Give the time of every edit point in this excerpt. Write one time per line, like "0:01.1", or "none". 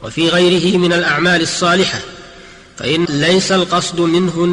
0:03.1